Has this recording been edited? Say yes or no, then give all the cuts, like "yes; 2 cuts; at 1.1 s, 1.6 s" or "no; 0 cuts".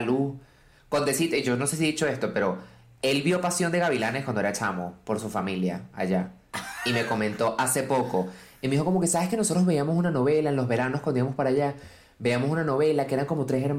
no; 0 cuts